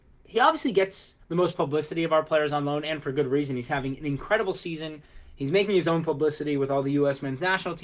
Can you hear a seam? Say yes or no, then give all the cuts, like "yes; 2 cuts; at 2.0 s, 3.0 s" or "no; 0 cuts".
yes; 1 cut; at 1.2 s